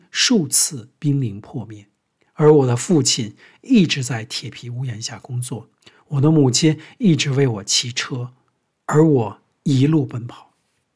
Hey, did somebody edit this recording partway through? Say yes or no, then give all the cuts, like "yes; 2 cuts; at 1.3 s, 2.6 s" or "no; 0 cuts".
no; 0 cuts